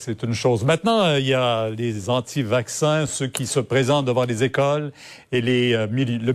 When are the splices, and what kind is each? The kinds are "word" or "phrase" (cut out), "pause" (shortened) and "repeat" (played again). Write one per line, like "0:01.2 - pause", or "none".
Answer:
none

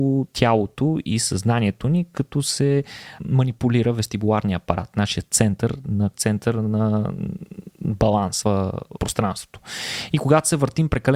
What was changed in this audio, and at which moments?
0:03.2 - word
0:06.1 - word
0:08.4 - word
0:09.0 - word

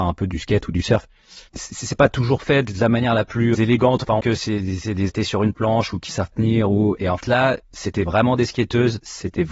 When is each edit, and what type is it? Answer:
0:01.5 - pause
0:03.5 - word
0:04.2 - phrase
0:05.1 - phrase
0:06.3 - word
0:07.2 - word
0:07.6 - pause

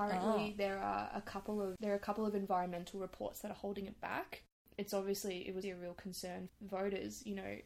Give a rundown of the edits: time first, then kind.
0:04.6 - pause
0:05.6 - word
0:06.5 - word

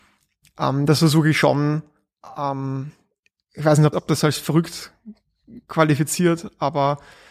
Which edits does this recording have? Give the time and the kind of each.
0:03.9 - word

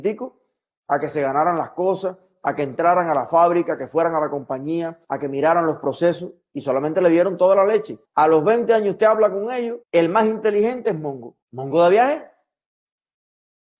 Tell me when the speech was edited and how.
0:05.0 - pause
0:08.0 - pause
0:09.8 - pause
0:11.4 - pause

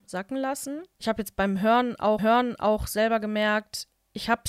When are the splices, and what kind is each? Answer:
0:00.9 - pause
0:02.2 - repeat

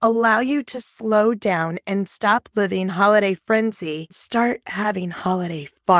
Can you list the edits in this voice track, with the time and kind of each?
0:04.1 - word

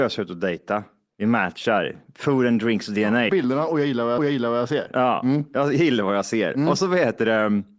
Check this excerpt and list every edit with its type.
0:03.3 - phrase
0:04.2 - repeat

